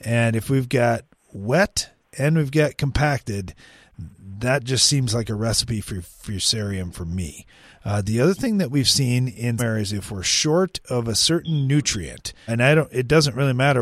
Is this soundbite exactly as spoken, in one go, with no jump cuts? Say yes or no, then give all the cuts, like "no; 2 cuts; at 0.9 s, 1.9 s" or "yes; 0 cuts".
no; 2 cuts; at 9.6 s, 12.5 s